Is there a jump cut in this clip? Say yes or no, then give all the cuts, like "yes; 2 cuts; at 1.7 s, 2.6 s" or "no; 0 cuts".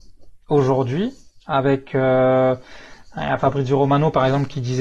no; 0 cuts